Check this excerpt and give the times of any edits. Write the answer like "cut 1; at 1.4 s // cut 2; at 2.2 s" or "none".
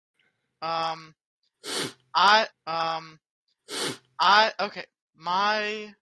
cut 1; at 2.5 s